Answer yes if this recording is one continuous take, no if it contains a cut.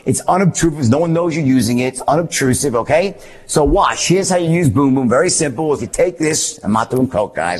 no